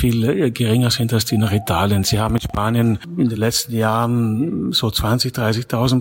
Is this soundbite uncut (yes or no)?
yes